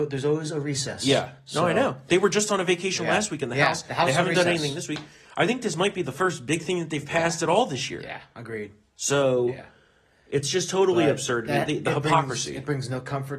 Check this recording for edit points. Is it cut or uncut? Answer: uncut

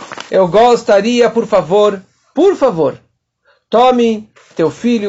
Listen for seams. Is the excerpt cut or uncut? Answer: uncut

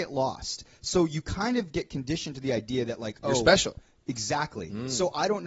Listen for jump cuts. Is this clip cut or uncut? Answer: uncut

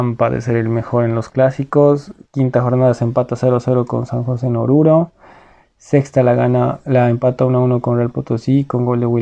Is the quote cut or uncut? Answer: uncut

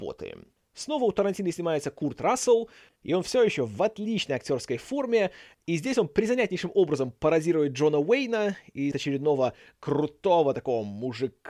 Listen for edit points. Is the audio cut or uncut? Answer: cut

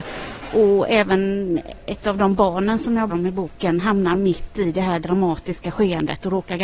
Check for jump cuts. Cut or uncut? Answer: cut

